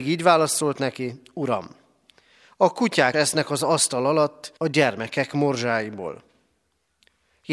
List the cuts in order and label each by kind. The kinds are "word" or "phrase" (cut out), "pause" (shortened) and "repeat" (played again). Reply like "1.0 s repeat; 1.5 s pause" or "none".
3.1 s word; 4.6 s pause